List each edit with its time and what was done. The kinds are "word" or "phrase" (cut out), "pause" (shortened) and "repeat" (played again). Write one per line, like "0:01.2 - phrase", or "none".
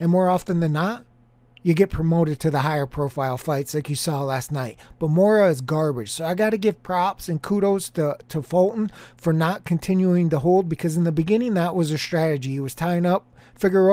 none